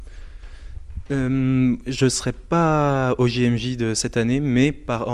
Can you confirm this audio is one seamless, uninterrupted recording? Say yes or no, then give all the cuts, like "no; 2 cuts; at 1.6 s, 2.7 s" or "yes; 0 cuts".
yes; 0 cuts